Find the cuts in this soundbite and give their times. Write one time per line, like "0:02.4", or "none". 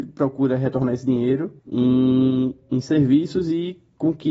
0:01.6